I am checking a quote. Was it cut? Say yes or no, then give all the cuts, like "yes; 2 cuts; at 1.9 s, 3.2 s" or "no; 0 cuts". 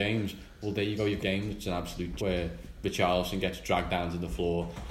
yes; 2 cuts; at 1.2 s, 2.2 s